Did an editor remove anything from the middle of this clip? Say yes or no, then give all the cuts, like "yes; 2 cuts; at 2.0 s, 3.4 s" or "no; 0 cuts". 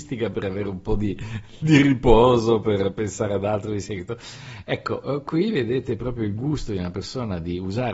no; 0 cuts